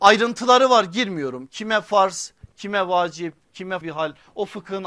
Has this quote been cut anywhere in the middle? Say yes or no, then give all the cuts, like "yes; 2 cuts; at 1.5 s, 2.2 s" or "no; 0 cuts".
yes; 1 cut; at 3.8 s